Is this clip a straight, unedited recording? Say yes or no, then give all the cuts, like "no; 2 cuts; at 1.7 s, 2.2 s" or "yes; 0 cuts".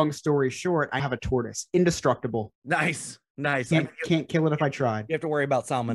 no; 2 cuts; at 1.0 s, 2.5 s